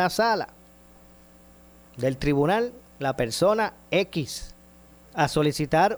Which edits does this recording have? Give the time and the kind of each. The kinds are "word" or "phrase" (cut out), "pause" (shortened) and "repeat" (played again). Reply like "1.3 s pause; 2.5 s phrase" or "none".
none